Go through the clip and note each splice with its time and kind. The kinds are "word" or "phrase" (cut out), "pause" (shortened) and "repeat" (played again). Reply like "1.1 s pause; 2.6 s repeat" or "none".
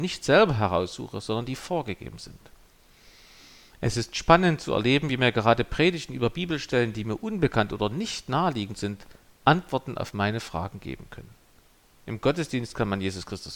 none

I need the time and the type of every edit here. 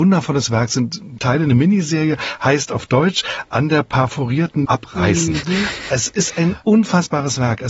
1.2 s word; 4.7 s word

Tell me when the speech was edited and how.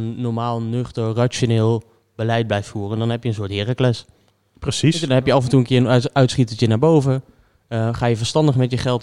none

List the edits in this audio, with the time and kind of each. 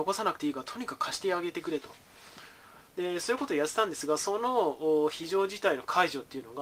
2.9 s pause

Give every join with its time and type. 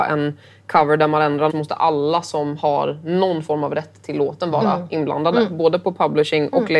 1.5 s word

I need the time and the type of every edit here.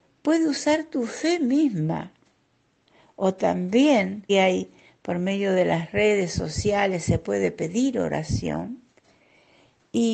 4.3 s word

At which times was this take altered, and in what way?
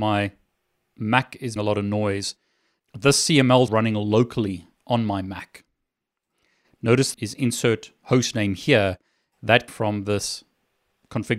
1.6 s word; 3.7 s phrase; 7.1 s word; 8.0 s pause; 9.7 s word

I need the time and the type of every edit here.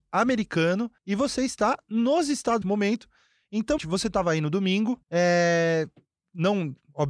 1.0 s pause; 2.6 s phrase; 3.8 s phrase; 5.0 s pause

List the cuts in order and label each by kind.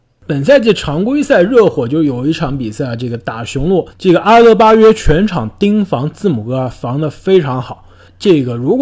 3.9 s pause

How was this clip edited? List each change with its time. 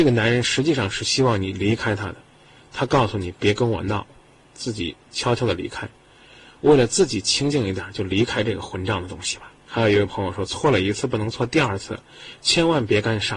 none

